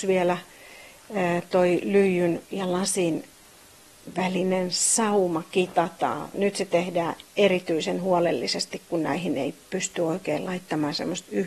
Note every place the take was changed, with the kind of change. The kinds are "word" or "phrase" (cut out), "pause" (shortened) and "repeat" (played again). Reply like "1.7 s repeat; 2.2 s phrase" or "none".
2.4 s pause; 6.3 s word